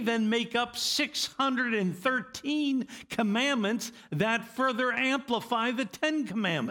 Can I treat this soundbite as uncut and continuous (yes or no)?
yes